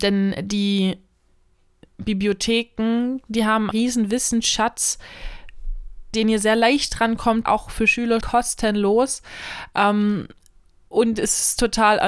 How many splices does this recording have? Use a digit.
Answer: 4